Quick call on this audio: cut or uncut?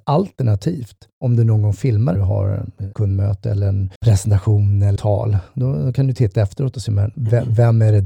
cut